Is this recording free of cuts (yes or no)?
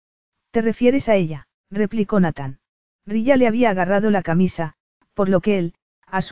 no